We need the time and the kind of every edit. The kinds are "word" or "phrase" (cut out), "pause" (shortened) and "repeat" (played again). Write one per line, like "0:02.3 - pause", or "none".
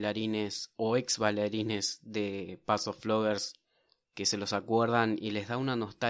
none